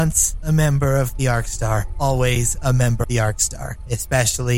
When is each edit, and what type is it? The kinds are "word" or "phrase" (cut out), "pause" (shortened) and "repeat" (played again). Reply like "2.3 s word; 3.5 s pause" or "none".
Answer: 3.0 s word